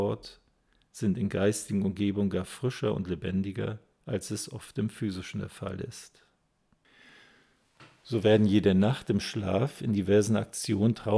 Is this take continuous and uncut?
yes; 0 cuts

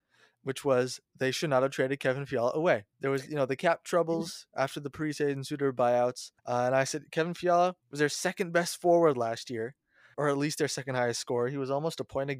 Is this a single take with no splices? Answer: no; 4 cuts; at 2.9 s, 6.4 s, 7.8 s, 10.1 s

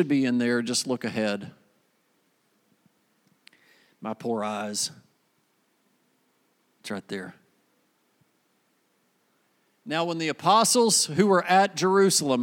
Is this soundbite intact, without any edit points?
yes; 0 cuts

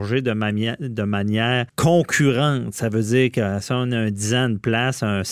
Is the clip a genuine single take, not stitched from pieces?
no; 1 cut; at 1.7 s

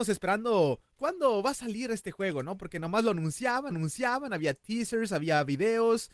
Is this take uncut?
no; 2 cuts; at 1.0 s, 3.7 s

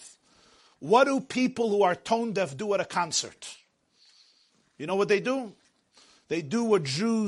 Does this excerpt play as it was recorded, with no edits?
yes; 0 cuts

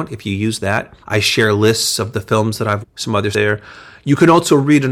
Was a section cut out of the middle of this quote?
yes; 3 cuts; at 1.0 s, 2.8 s, 3.3 s

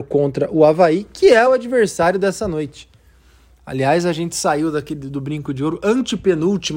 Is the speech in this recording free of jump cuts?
yes; 0 cuts

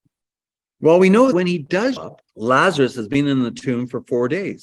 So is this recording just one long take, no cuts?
no; 3 cuts; at 1.3 s, 2.0 s, 2.3 s

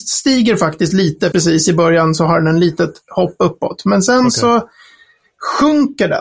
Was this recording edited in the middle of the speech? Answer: yes; 1 cut; at 1.3 s

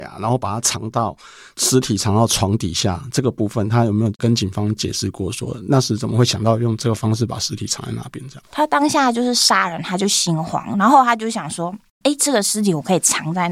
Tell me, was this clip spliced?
no; 0 cuts

